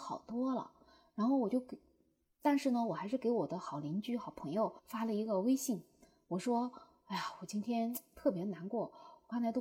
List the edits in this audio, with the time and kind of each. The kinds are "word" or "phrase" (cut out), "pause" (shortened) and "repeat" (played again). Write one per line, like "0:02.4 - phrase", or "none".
0:04.8 - pause